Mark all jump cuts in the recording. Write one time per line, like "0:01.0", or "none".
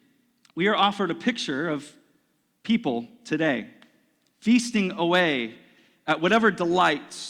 none

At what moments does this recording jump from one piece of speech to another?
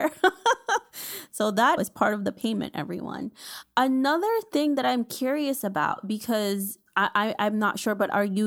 0:01.8

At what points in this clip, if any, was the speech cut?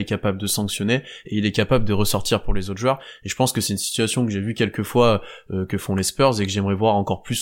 none

